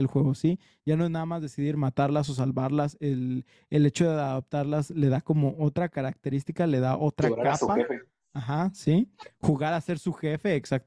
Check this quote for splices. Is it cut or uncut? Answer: uncut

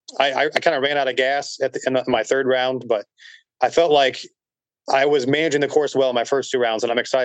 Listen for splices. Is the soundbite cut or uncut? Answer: uncut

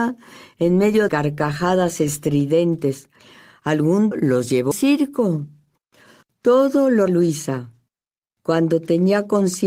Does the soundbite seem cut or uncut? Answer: cut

